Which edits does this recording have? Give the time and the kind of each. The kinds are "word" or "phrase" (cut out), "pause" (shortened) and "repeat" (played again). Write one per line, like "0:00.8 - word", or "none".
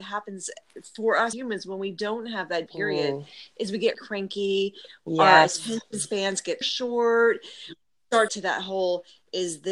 0:01.3 - word
0:02.7 - word
0:03.9 - word
0:06.6 - word
0:08.3 - phrase